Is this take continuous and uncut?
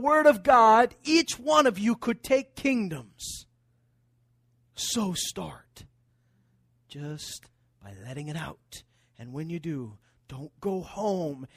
yes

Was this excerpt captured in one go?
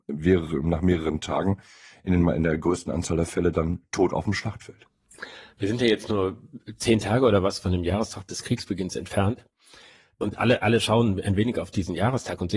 yes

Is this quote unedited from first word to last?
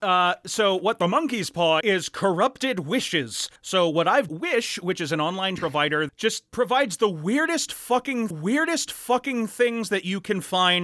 no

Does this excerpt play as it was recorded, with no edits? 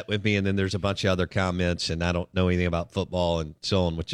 yes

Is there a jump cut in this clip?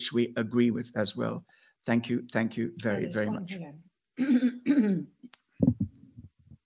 no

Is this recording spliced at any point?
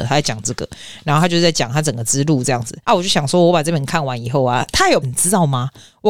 yes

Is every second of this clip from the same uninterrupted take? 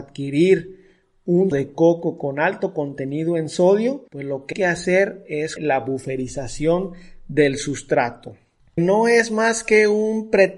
no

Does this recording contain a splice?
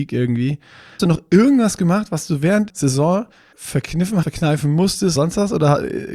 yes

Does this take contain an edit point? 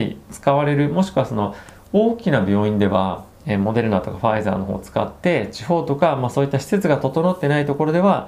yes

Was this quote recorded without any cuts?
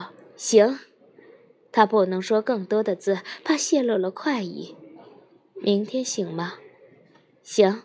yes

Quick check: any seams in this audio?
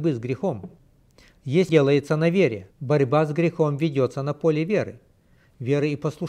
yes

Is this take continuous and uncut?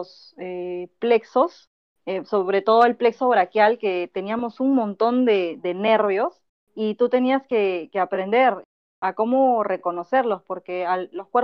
yes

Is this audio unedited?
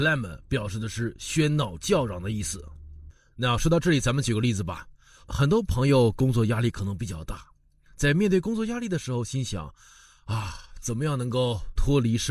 yes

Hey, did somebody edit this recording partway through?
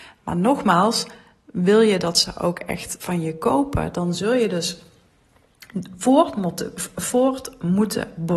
no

